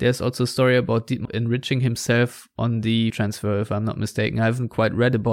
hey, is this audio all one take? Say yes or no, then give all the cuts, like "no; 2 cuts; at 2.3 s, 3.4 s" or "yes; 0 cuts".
no; 2 cuts; at 1.3 s, 3.1 s